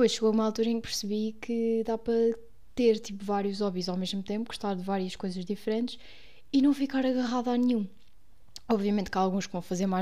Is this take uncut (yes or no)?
yes